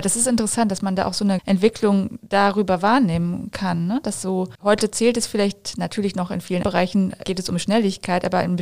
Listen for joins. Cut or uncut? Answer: cut